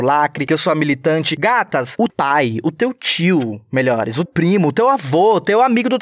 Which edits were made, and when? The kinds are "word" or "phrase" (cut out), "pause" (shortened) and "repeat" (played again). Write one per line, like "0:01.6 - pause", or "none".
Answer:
0:02.1 - word
0:04.3 - word